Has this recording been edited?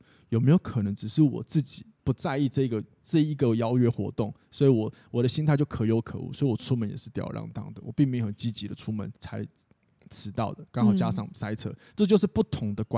yes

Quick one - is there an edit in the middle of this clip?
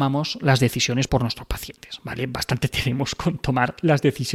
yes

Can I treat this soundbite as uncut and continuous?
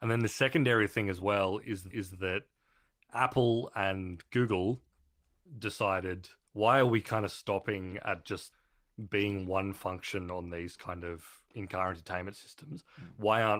no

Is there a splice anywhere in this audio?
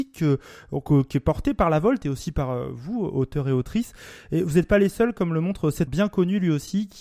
yes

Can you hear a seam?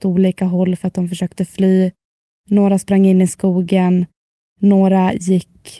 no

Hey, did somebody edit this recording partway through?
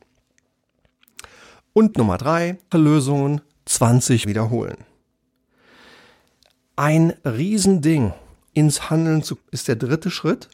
yes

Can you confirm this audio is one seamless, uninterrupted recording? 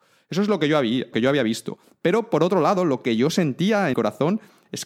no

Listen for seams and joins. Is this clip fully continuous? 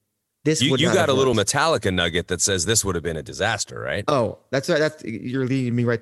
yes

